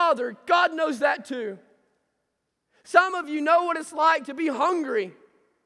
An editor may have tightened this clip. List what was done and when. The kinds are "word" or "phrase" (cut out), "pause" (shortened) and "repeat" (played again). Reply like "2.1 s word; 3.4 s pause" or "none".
none